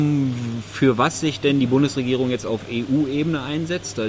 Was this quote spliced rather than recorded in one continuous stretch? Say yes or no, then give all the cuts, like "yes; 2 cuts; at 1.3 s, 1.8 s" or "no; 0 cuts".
no; 0 cuts